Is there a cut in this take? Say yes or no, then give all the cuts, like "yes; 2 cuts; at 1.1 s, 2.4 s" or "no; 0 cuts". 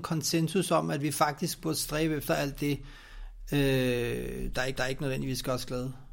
yes; 1 cut; at 4.8 s